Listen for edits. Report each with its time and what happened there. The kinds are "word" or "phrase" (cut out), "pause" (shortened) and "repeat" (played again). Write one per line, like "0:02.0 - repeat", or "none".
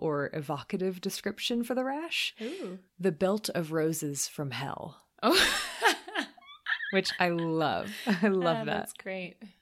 0:02.9 - pause

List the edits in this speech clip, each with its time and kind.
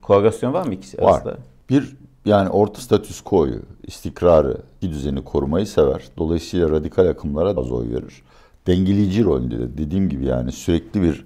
0:02.8 - word
0:04.8 - word
0:07.6 - word

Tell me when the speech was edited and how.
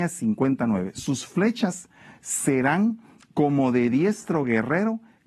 none

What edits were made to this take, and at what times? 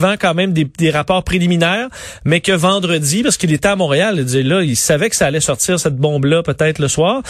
none

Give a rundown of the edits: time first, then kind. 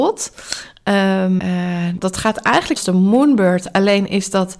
0:01.4 - word
0:02.0 - phrase
0:02.8 - phrase

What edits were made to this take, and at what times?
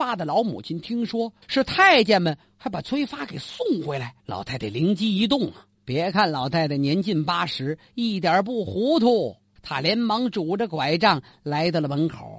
0:01.4 - pause
0:04.2 - pause
0:05.8 - pause
0:09.6 - pause

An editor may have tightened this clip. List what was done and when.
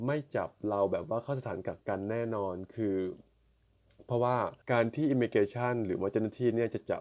0:04.6 - pause

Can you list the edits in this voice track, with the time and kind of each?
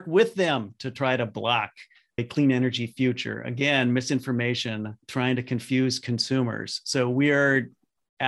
0:02.2 - phrase
0:05.0 - pause

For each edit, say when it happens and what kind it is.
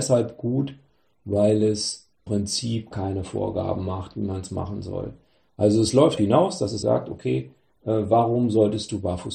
0:02.3 - word
0:02.9 - word
0:06.2 - word
0:06.8 - word

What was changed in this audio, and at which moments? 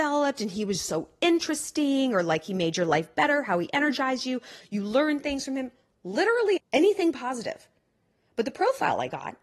0:06.6 - word

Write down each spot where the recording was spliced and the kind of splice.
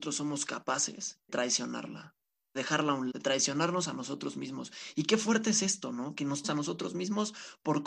0:01.3 - word
0:02.6 - word
0:03.1 - word
0:06.4 - word

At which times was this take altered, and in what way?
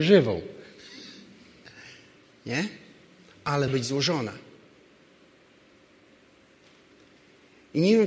0:03.7 - word

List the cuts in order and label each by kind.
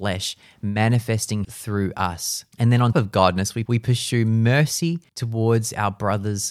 0:01.4 - word
0:02.5 - pause
0:02.9 - word
0:03.7 - phrase
0:05.1 - pause

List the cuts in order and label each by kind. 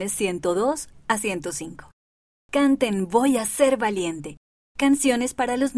none

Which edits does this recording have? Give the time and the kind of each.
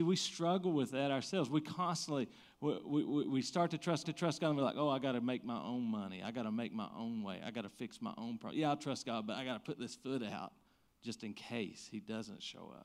0:04.0 - repeat

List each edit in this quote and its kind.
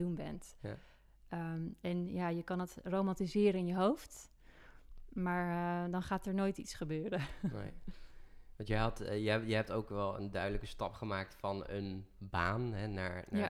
none

